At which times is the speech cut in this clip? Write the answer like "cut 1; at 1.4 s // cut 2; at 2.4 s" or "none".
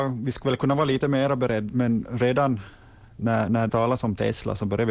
cut 1; at 1.7 s // cut 2; at 3.1 s // cut 3; at 3.7 s